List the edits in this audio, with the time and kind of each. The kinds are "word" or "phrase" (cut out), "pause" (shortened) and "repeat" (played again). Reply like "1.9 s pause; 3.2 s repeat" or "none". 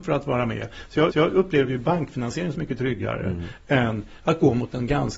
1.1 s repeat; 2.5 s word